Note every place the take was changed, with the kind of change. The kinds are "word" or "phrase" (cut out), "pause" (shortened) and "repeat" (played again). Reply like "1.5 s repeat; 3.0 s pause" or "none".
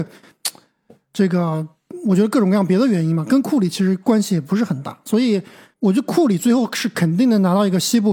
none